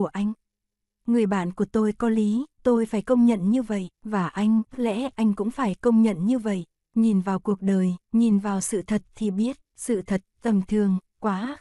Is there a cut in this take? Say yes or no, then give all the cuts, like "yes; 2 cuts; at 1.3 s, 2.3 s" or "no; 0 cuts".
yes; 6 cuts; at 2.5 s, 3.9 s, 4.7 s, 6.8 s, 8.0 s, 9.6 s